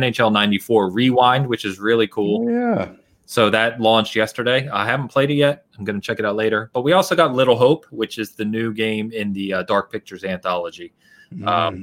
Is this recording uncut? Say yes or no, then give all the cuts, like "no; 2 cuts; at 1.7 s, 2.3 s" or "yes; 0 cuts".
yes; 0 cuts